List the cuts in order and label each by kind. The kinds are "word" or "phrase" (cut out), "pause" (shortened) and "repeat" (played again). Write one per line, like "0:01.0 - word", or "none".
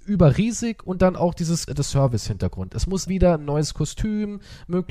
0:01.7 - word
0:03.1 - word